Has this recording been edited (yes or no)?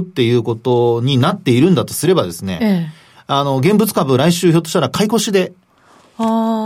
no